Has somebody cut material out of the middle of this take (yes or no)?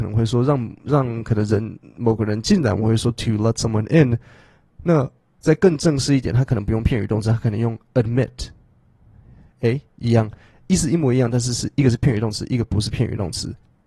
no